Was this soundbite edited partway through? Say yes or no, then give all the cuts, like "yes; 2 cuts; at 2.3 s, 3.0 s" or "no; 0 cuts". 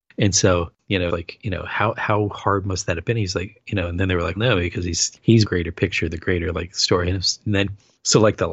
yes; 3 cuts; at 1.1 s, 4.4 s, 5.4 s